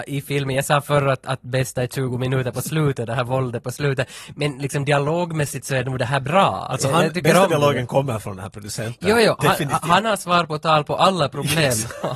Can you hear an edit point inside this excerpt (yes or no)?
no